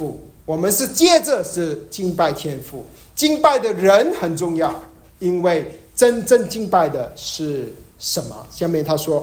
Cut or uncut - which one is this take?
uncut